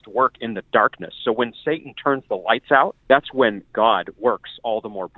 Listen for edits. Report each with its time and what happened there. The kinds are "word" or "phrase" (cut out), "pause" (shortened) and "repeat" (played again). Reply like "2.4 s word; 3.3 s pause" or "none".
3.0 s pause